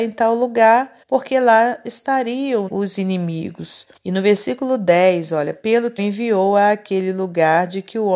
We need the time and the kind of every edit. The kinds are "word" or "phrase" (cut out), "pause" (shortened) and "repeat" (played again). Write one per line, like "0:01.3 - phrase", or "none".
0:01.0 - pause
0:02.7 - word
0:04.0 - pause
0:06.0 - phrase